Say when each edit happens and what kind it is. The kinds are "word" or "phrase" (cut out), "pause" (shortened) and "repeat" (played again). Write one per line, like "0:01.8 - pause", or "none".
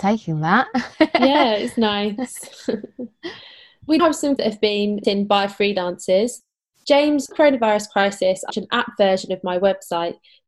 0:00.9 - pause
0:04.0 - word
0:04.4 - word
0:05.0 - word
0:07.3 - phrase
0:08.5 - phrase